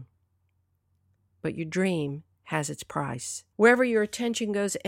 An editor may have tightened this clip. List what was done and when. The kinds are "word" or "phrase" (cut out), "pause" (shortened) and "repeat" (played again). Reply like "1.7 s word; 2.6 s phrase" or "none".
3.5 s pause